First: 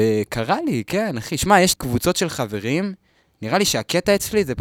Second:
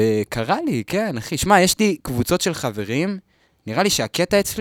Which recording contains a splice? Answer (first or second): first